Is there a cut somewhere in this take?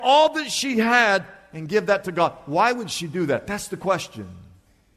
no; 0 cuts

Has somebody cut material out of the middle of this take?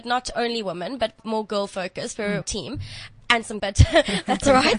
yes; 3 cuts; at 1.2 s, 2.4 s, 3.6 s

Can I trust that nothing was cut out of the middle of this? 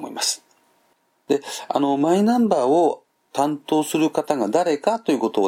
yes; 0 cuts

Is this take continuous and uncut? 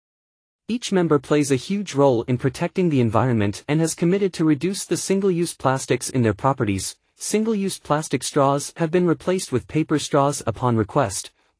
yes; 0 cuts

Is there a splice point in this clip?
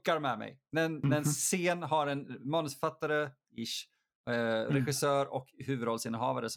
no; 0 cuts

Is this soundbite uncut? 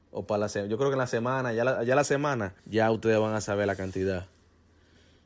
no; 1 cut; at 2.6 s

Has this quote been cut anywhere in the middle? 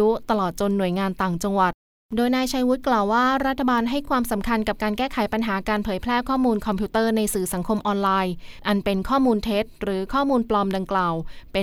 no; 0 cuts

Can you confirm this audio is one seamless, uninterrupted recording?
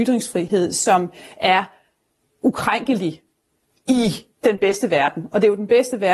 yes; 0 cuts

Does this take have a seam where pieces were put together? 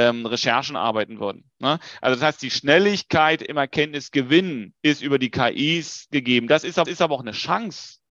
yes; 2 cuts; at 4.8 s, 6.8 s

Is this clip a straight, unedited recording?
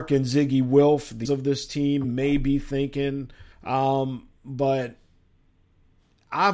no; 3 cuts; at 1.2 s, 2.0 s, 3.5 s

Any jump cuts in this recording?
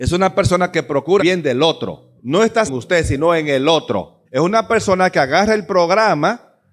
yes; 4 cuts; at 1.2 s, 2.2 s, 2.7 s, 4.3 s

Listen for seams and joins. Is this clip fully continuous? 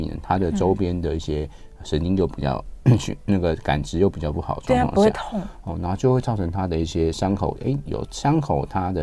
yes; 0 cuts

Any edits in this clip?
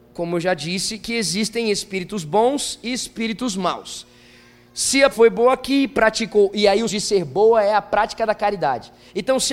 yes; 2 cuts; at 5.1 s, 6.9 s

